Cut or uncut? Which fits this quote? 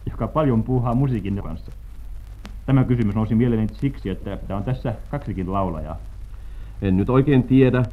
cut